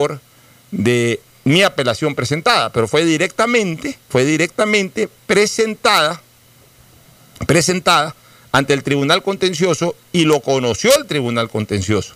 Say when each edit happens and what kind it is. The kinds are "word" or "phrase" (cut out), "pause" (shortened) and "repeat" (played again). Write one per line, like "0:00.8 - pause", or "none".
none